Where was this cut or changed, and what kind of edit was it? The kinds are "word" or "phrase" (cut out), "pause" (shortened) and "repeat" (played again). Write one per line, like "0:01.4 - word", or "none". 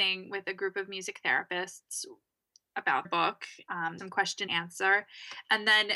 0:03.0 - word
0:04.0 - word
0:04.5 - word

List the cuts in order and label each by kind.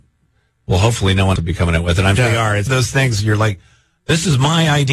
0:01.4 - word
0:02.2 - word
0:02.7 - word

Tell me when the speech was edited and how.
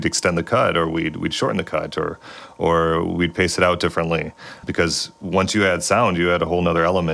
0:04.6 - word

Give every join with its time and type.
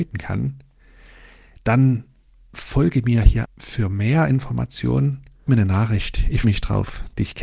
0:03.4 - word
0:05.5 - phrase
0:06.4 - word

